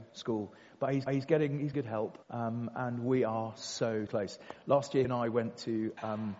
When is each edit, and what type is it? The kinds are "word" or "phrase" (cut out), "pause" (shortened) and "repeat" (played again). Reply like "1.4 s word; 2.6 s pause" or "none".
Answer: 1.1 s repeat; 1.7 s word; 2.2 s pause; 4.1 s word; 5.0 s word